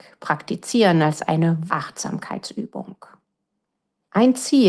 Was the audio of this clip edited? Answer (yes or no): yes